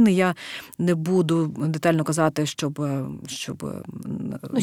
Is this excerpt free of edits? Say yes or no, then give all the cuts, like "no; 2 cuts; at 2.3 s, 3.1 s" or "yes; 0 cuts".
yes; 0 cuts